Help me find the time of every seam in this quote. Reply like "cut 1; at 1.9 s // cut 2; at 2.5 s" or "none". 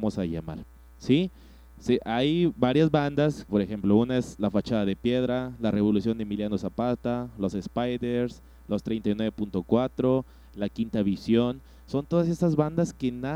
cut 1; at 3.5 s

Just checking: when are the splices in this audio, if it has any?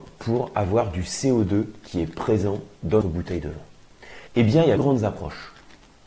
cut 1; at 3.0 s // cut 2; at 4.3 s // cut 3; at 4.8 s

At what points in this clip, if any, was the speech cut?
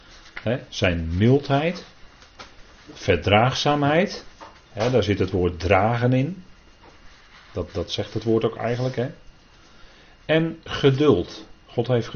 none

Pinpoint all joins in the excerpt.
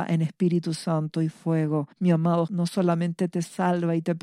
cut 1; at 1.9 s // cut 2; at 2.5 s

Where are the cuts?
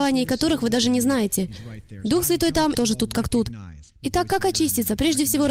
cut 1; at 2.7 s // cut 2; at 3.9 s

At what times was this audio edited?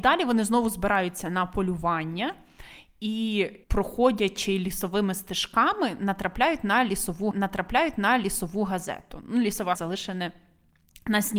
cut 1; at 3.6 s // cut 2; at 7.3 s // cut 3; at 9.7 s

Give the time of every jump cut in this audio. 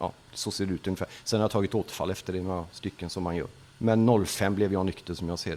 cut 1; at 3.6 s

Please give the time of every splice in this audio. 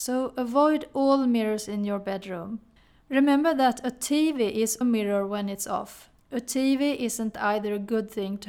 cut 1; at 2.8 s // cut 2; at 4.8 s // cut 3; at 6.2 s

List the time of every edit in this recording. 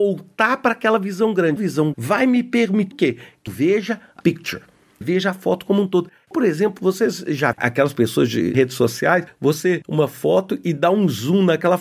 cut 1; at 1.6 s // cut 2; at 1.9 s // cut 3; at 2.9 s // cut 4; at 3.5 s // cut 5; at 4.2 s // cut 6; at 5.0 s // cut 7; at 6.3 s // cut 8; at 7.5 s // cut 9; at 9.8 s

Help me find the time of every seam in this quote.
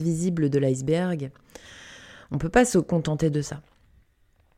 none

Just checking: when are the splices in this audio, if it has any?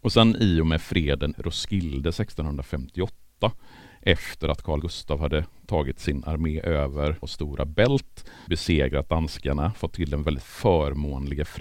cut 1; at 1.3 s // cut 2; at 4.8 s // cut 3; at 7.2 s // cut 4; at 8.5 s

